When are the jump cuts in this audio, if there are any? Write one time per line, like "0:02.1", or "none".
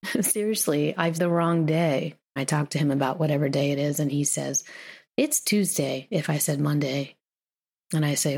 0:01.1
0:02.4
0:05.1